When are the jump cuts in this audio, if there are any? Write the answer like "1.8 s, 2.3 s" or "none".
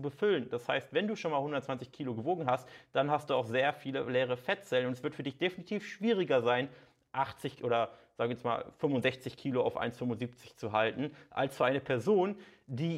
none